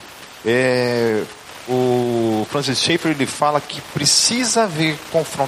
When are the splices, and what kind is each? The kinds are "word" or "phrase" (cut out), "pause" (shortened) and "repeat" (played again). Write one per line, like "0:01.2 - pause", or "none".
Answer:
none